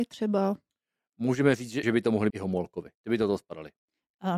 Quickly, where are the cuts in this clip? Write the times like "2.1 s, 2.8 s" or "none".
1.8 s, 2.3 s, 3.0 s